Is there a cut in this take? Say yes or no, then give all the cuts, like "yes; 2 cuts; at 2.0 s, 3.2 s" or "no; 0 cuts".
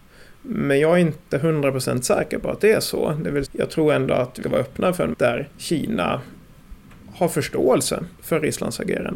yes; 5 cuts; at 3.4 s, 4.4 s, 5.1 s, 5.5 s, 8.1 s